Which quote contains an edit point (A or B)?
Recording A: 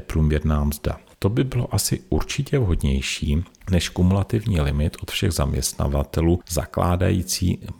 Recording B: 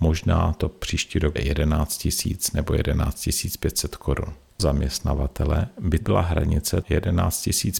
B